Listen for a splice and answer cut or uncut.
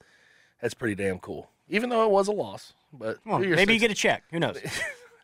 cut